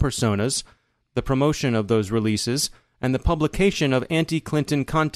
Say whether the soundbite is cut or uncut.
uncut